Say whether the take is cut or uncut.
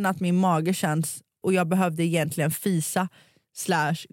cut